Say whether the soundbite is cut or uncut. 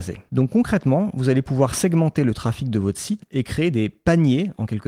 uncut